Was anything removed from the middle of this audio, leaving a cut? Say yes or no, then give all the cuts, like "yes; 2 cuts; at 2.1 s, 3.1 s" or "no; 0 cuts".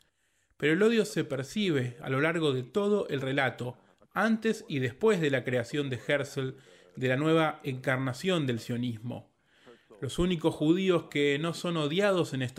no; 0 cuts